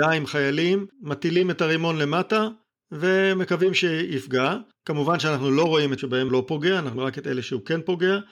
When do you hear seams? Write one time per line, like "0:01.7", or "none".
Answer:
0:00.9
0:06.0
0:06.3
0:07.0